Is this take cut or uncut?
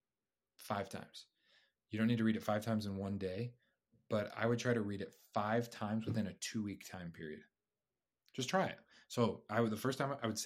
uncut